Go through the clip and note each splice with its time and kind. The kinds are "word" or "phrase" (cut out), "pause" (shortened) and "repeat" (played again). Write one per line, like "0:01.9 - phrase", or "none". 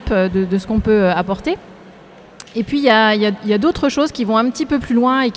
none